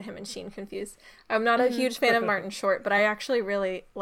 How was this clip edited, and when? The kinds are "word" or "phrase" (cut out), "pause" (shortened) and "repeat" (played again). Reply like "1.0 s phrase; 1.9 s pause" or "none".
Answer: none